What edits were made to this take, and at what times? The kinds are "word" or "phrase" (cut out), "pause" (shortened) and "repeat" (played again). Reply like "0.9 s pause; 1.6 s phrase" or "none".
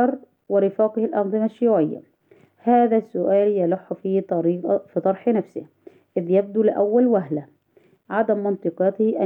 none